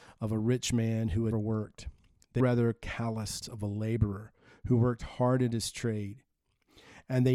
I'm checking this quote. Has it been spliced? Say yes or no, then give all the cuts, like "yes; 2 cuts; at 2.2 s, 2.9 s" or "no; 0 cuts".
yes; 3 cuts; at 1.3 s, 2.4 s, 3.4 s